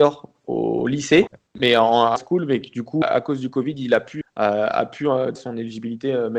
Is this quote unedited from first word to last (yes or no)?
no